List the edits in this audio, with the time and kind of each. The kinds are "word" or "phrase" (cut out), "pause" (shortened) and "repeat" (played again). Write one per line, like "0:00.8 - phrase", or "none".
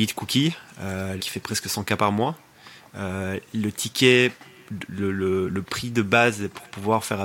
0:01.2 - word
0:04.9 - word